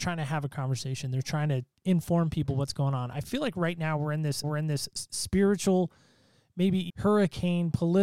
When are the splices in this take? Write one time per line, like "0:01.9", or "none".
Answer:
0:04.4
0:06.9